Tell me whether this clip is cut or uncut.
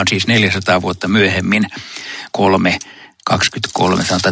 cut